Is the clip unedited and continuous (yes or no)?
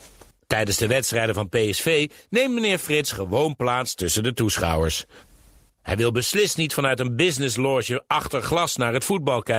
yes